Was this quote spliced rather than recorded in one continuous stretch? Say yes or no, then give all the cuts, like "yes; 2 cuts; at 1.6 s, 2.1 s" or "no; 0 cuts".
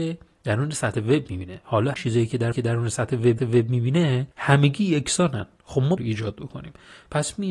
yes; 5 cuts; at 1.9 s, 2.5 s, 3.4 s, 4.3 s, 6.0 s